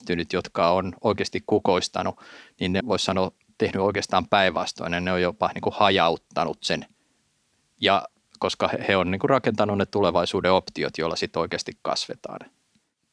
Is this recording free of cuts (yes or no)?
no